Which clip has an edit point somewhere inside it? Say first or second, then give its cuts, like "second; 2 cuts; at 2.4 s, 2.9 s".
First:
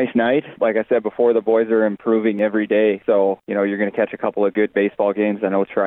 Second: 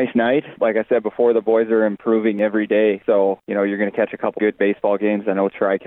second; 1 cut; at 4.4 s